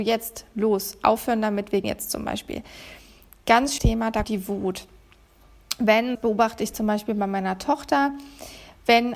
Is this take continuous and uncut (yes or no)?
no